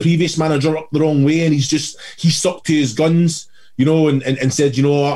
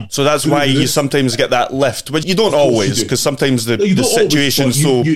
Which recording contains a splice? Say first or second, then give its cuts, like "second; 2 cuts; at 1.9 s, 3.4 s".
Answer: second; 1 cut; at 2.2 s